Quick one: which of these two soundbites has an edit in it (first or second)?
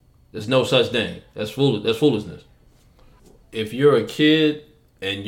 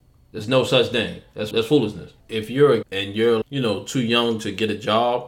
second